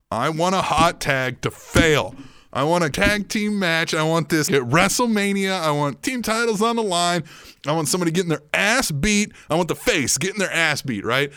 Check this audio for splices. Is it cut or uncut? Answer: cut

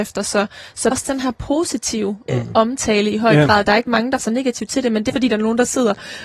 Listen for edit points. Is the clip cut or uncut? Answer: cut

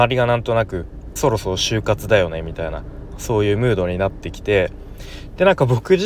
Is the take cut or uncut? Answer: cut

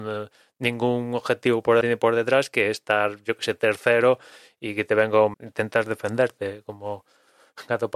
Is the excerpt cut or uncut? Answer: cut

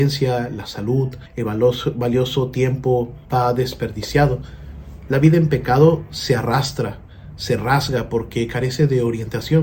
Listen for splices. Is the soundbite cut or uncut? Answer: cut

